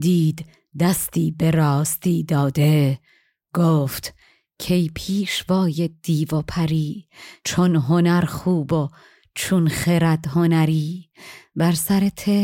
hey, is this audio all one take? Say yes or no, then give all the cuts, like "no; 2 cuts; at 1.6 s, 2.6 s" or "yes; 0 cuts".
yes; 0 cuts